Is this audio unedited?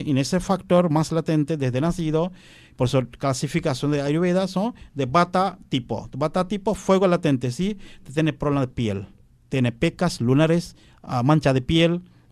yes; 0 cuts

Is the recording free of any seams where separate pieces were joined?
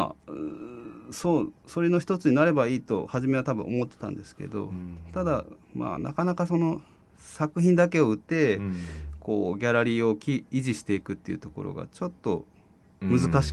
no; 1 cut; at 8.2 s

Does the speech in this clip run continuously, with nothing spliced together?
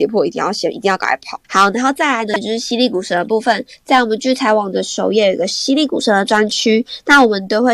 no; 1 cut; at 1.4 s

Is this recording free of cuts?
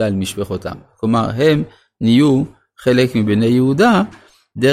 yes; 0 cuts

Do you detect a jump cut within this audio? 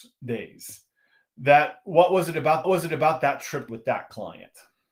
yes; 2 cuts; at 2.6 s, 3.7 s

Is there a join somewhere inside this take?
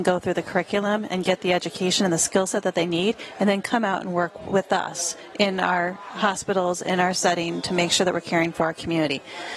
no; 0 cuts

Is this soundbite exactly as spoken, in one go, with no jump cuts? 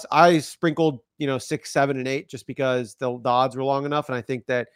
yes; 0 cuts

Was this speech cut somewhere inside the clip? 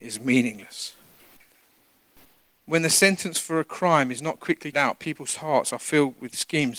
yes; 1 cut; at 4.7 s

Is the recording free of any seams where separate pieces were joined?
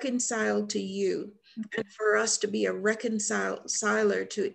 yes; 0 cuts

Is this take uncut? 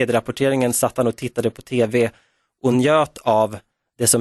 yes; 0 cuts

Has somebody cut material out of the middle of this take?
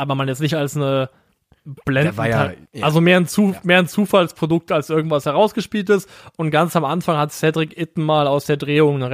yes; 1 cut; at 2.7 s

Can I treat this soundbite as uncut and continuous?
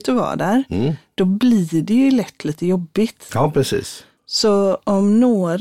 yes; 0 cuts

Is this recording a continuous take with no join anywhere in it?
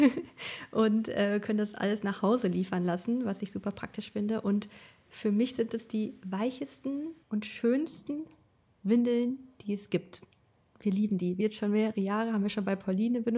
no; 2 cuts; at 7.2 s, 11.4 s

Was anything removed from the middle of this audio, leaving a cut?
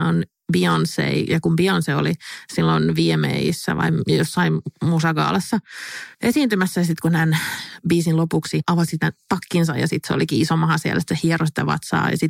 yes; 1 cut; at 6.1 s

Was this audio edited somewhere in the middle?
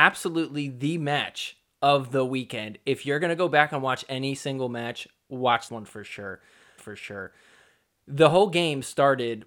yes; 2 cuts; at 5.7 s, 6.8 s

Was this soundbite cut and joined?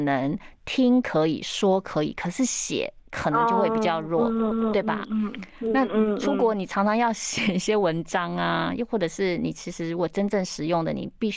yes; 1 cut; at 4.5 s

